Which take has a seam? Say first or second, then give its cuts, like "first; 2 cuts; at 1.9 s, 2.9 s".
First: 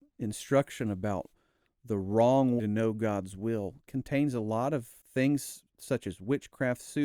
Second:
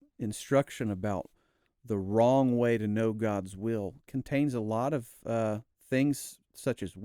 first; 2 cuts; at 2.6 s, 5.0 s